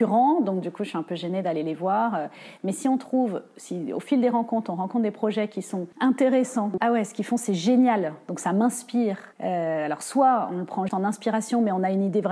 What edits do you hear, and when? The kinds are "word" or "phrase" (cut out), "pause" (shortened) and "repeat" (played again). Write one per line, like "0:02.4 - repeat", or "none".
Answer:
0:05.9 - pause
0:06.8 - phrase
0:09.3 - pause
0:10.9 - word